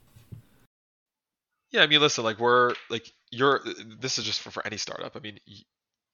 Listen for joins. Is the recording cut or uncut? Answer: uncut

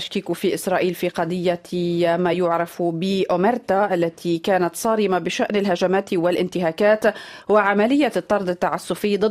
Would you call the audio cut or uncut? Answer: uncut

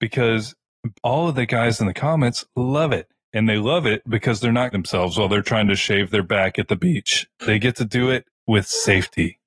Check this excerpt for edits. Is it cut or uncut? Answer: cut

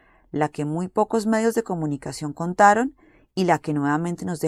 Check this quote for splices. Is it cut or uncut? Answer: uncut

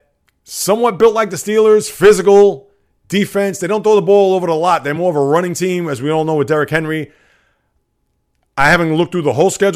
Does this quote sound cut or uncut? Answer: uncut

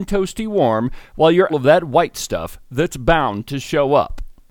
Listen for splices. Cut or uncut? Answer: cut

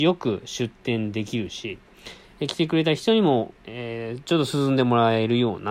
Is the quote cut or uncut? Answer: cut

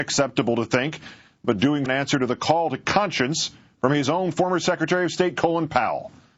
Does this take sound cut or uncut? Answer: cut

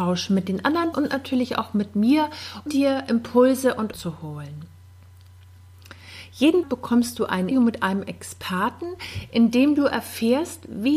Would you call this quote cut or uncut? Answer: cut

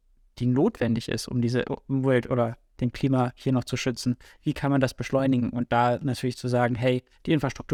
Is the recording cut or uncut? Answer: uncut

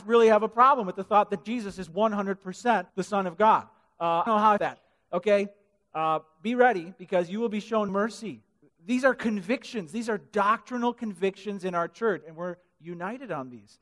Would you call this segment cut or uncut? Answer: cut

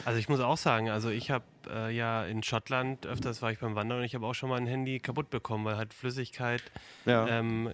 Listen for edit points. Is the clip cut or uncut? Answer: uncut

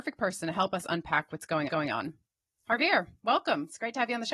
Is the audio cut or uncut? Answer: cut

